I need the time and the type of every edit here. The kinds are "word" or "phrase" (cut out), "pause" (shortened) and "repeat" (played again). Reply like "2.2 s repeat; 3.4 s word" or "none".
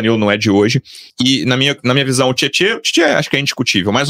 1.1 s pause